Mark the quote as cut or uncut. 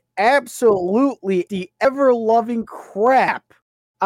cut